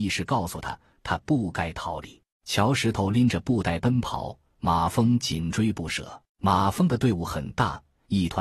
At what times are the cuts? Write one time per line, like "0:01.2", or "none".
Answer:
0:02.3
0:06.3